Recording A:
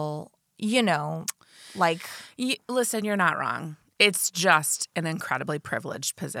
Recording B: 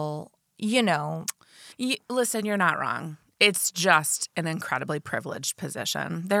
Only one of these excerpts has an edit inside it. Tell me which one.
B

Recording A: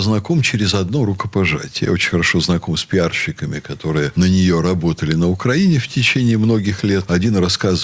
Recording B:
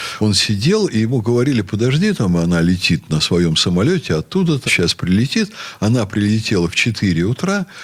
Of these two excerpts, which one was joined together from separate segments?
B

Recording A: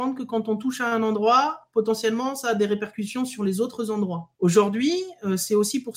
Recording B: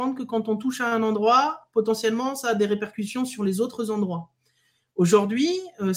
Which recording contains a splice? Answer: A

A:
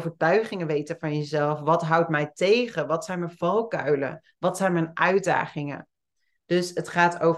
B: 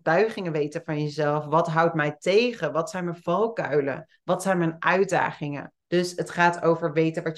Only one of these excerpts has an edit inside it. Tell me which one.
B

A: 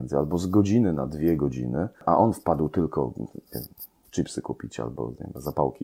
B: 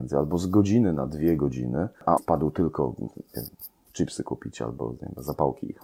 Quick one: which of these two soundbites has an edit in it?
B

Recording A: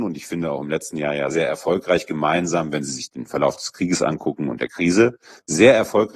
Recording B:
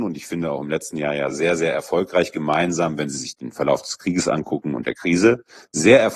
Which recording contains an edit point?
A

